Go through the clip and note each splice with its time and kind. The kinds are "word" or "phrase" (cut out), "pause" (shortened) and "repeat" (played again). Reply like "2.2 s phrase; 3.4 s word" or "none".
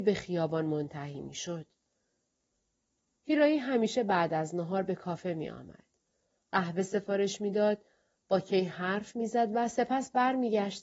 none